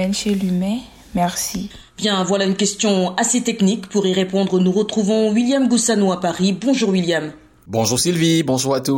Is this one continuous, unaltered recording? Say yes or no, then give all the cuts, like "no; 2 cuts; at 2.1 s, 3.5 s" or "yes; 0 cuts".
yes; 0 cuts